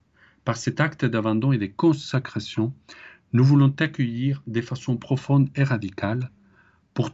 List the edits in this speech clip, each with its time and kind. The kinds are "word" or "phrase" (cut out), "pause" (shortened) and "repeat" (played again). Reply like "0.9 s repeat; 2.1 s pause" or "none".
5.0 s word